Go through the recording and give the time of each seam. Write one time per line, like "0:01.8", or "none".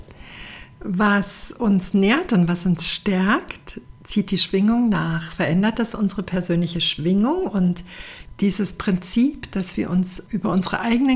none